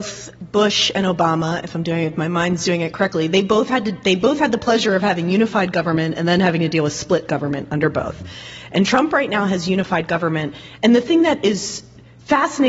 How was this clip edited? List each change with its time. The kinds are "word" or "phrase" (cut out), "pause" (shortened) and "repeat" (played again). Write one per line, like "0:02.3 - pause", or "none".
none